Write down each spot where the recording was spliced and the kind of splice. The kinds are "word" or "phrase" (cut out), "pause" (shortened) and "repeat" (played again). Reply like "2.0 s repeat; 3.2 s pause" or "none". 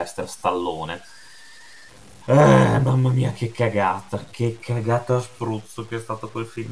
none